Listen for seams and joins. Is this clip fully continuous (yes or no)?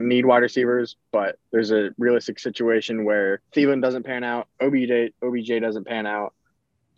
no